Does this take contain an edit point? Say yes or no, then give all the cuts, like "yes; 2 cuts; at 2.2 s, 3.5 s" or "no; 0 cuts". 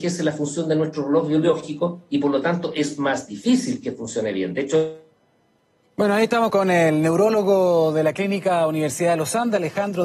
yes; 2 cuts; at 5.6 s, 6.5 s